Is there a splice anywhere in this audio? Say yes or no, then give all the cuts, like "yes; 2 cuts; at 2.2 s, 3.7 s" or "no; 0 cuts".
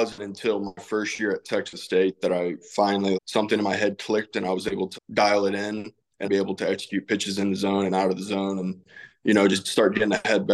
yes; 3 cuts; at 3.1 s, 4.9 s, 6.2 s